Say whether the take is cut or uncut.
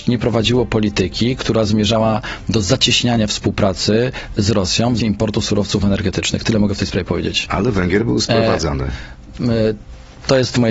cut